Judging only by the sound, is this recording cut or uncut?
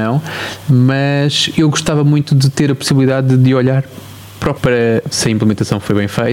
cut